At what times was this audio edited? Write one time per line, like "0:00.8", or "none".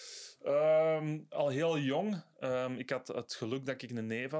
none